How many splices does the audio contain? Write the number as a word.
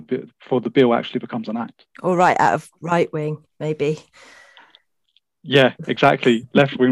two